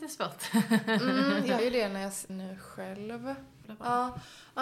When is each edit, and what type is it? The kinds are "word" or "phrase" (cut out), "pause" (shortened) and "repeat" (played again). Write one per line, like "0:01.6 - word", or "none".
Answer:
0:01.6 - word
0:02.3 - phrase